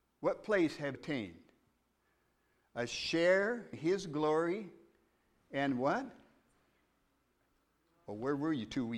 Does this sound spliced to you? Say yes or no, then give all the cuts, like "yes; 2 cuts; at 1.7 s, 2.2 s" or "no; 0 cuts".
yes; 2 cuts; at 0.9 s, 3.7 s